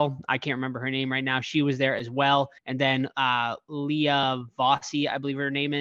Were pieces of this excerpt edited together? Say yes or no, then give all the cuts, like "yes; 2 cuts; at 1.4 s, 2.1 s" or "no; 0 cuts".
yes; 1 cut; at 2.6 s